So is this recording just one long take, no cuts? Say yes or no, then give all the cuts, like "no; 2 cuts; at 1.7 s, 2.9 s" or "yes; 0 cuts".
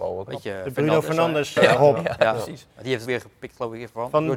no; 2 cuts; at 1.6 s, 3.1 s